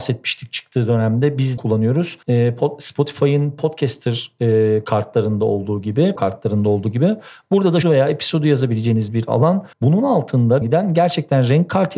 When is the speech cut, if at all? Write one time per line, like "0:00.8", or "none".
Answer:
0:01.6
0:02.2
0:06.2
0:07.8
0:09.7
0:10.6